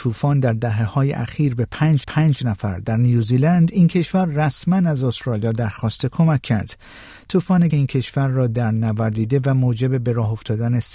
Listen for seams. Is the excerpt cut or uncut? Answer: cut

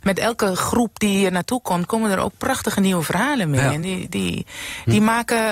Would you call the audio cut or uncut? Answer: uncut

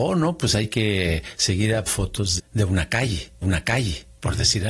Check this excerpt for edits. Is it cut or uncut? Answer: cut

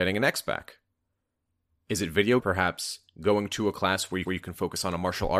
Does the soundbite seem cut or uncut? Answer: cut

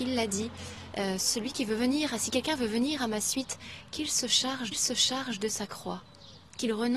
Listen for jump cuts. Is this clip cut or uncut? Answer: cut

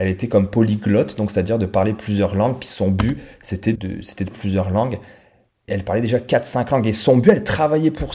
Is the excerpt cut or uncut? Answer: cut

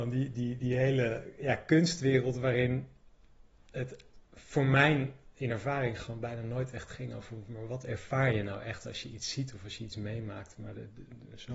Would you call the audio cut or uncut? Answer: cut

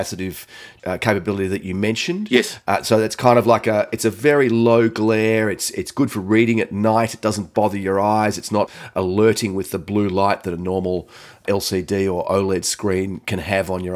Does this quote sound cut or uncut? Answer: uncut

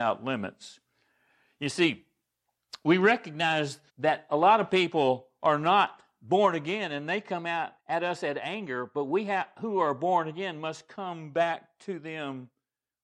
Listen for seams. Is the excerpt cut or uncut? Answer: cut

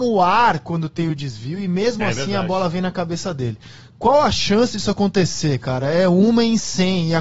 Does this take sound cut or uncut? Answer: uncut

